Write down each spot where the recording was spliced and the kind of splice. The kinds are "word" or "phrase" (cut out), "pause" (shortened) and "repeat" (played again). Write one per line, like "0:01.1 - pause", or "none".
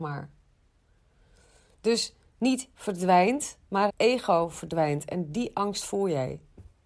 0:02.7 - word
0:03.9 - word